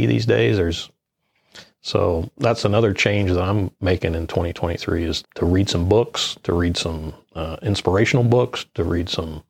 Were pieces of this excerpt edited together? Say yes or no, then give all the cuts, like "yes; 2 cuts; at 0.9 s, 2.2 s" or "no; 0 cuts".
yes; 1 cut; at 5.2 s